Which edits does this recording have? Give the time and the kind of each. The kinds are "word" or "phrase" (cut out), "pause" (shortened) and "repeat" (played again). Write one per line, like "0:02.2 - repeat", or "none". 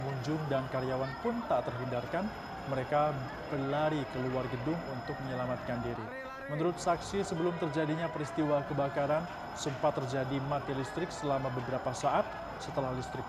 none